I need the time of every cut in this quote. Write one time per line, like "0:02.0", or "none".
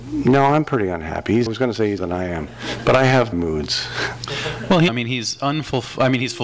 0:01.5
0:02.0
0:03.3
0:04.9